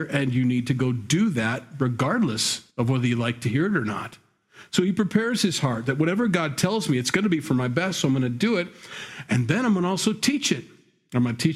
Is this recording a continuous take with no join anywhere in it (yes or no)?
no